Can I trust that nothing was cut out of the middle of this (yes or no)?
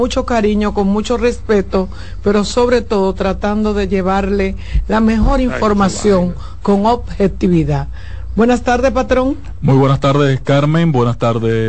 yes